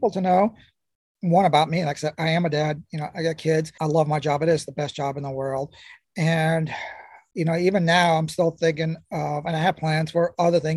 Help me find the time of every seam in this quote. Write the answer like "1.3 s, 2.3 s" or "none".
2.9 s